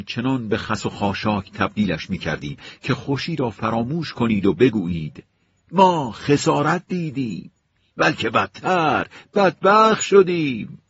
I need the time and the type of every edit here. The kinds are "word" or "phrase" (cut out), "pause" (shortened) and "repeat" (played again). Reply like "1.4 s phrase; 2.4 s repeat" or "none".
none